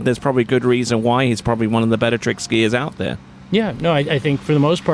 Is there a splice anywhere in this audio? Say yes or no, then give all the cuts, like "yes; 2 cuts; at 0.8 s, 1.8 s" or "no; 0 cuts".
no; 0 cuts